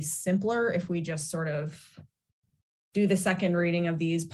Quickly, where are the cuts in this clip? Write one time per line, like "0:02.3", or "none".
none